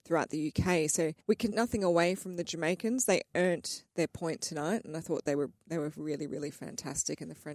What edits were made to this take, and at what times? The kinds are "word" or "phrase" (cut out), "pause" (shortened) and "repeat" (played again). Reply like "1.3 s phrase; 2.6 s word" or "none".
1.2 s pause; 1.5 s word